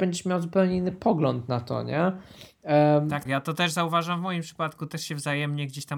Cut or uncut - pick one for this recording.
cut